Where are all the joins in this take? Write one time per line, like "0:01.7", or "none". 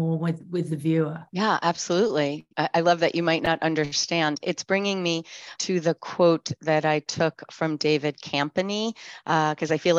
0:01.3
0:02.5
0:05.5